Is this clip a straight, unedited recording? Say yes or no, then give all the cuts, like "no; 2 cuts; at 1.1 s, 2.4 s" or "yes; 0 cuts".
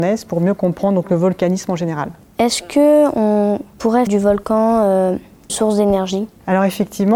no; 3 cuts; at 2.2 s, 4.1 s, 5.5 s